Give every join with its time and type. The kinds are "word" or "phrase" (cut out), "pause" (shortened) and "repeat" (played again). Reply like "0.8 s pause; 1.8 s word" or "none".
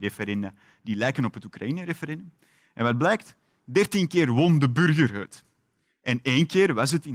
none